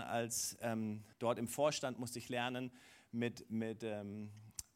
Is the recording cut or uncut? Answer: cut